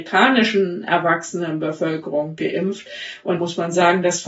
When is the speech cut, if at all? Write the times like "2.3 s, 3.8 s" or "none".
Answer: 3.4 s